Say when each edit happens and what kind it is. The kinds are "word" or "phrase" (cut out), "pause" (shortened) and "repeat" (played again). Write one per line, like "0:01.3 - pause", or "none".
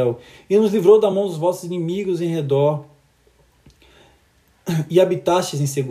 none